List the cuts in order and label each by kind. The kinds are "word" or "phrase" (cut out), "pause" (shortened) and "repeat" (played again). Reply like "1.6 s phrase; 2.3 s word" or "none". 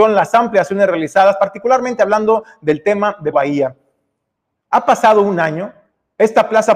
3.3 s word